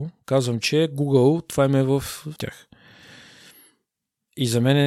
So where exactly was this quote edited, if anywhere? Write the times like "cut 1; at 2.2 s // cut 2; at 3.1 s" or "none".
cut 1; at 2.4 s